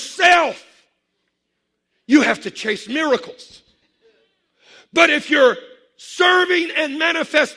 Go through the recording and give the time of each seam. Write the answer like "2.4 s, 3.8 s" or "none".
none